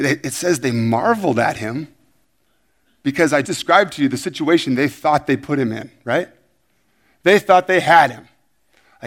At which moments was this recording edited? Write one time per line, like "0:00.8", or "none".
0:03.4